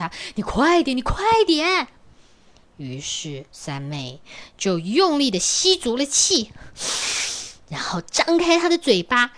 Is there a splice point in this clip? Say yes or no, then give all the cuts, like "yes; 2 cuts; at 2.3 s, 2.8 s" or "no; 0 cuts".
yes; 1 cut; at 3.5 s